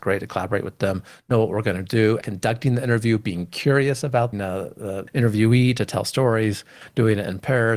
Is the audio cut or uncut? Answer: cut